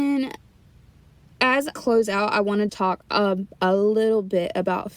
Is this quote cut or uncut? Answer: cut